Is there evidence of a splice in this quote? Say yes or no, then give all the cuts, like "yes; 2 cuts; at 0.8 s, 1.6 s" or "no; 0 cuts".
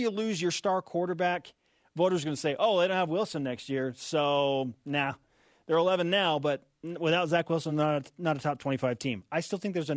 no; 0 cuts